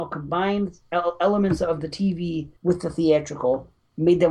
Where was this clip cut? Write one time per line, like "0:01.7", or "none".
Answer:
0:02.6